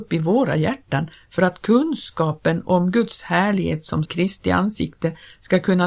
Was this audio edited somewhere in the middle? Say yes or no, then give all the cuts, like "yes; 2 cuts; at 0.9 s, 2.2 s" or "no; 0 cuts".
yes; 1 cut; at 4.0 s